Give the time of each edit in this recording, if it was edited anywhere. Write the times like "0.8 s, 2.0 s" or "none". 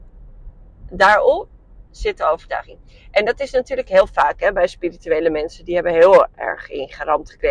none